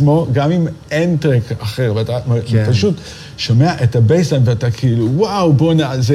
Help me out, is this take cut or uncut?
uncut